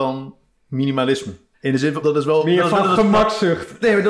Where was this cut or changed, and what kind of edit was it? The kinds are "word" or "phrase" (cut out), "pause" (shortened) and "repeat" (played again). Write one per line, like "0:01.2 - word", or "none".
0:01.5 - pause
0:02.0 - word